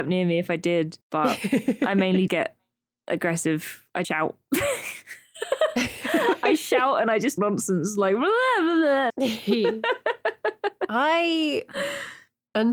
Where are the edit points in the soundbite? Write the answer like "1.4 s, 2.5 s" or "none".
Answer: 1.0 s, 2.3 s, 4.0 s, 7.4 s, 9.1 s